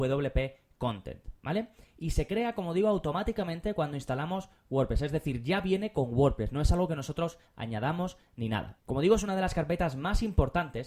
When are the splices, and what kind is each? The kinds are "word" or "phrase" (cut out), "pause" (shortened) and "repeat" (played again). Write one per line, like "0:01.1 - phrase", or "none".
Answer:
none